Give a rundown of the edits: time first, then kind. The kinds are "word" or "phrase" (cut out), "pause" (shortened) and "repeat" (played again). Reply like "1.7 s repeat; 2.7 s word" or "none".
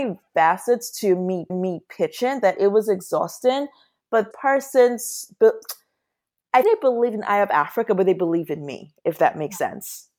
1.5 s repeat; 4.3 s word; 6.6 s word

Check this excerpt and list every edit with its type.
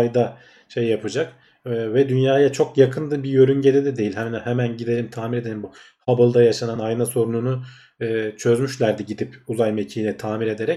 none

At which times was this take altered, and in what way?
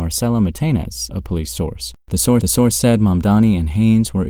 1.1 s word; 2.0 s pause; 2.4 s repeat

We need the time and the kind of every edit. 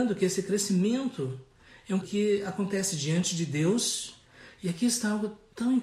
2.0 s word

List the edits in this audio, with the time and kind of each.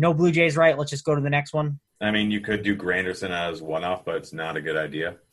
1.9 s pause

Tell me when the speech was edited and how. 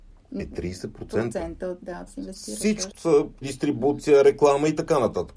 2.1 s word; 2.9 s word; 3.4 s word

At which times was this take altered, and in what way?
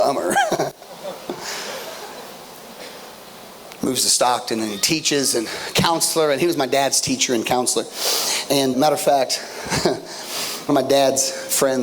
8.7 s word; 10.7 s word

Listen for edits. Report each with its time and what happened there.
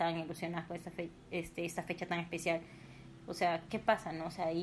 3.7 s word

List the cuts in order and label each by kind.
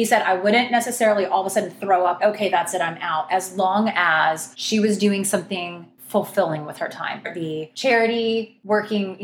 2.2 s word; 4.5 s pause; 7.2 s word

